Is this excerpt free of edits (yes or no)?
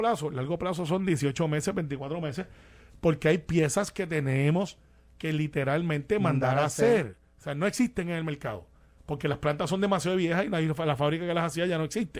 yes